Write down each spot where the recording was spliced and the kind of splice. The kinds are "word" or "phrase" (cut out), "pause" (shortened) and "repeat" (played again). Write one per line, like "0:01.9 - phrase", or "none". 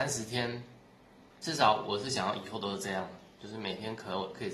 0:01.3 - pause

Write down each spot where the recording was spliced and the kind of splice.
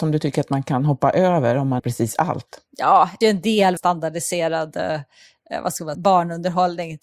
0:01.8 - phrase
0:03.2 - phrase
0:03.8 - word
0:05.9 - word

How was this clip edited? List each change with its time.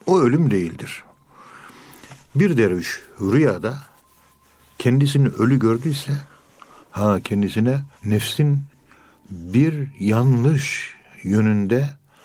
0:02.2 - pause
0:07.9 - pause

